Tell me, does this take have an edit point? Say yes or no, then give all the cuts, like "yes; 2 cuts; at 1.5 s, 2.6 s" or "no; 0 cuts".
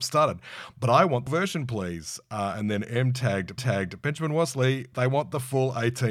yes; 2 cuts; at 1.3 s, 3.6 s